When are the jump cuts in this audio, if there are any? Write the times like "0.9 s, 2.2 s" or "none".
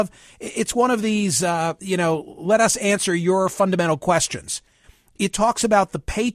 none